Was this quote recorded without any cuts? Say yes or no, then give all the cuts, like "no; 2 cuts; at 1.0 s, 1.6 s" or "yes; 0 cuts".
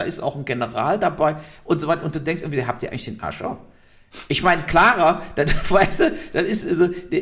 yes; 0 cuts